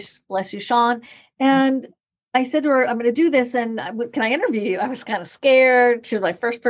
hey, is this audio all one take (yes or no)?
yes